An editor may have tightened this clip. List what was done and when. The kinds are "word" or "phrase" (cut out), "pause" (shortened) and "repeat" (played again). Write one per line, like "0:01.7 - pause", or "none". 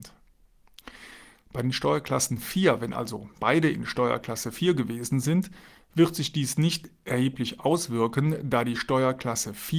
none